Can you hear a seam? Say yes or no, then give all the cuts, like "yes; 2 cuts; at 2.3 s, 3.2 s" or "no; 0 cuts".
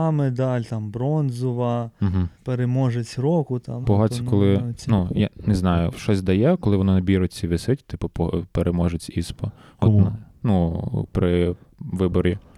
yes; 3 cuts; at 2.3 s, 3.8 s, 5.9 s